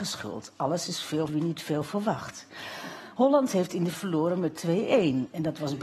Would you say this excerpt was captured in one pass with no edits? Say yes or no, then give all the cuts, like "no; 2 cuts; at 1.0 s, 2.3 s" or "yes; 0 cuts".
no; 2 cuts; at 1.3 s, 3.9 s